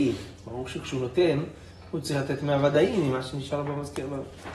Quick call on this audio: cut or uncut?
uncut